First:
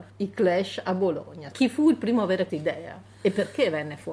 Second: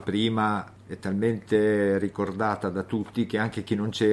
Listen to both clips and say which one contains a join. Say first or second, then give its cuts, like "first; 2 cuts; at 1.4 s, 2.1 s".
first; 2 cuts; at 1.5 s, 2.5 s